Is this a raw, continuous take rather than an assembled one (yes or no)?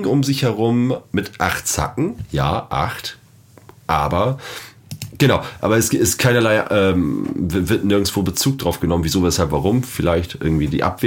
yes